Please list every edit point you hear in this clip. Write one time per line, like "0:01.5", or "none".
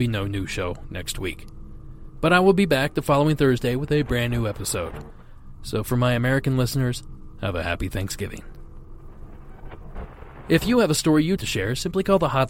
0:11.4